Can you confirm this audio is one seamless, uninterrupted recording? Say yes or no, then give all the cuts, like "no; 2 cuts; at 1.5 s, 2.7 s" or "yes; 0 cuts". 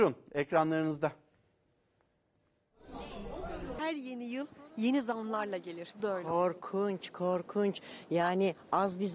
no; 1 cut; at 6.0 s